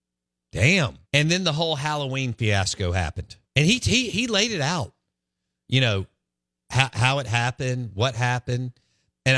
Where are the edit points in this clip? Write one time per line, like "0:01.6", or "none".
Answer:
0:01.0
0:03.4